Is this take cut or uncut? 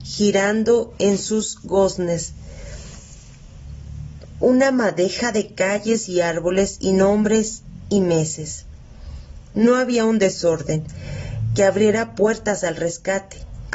uncut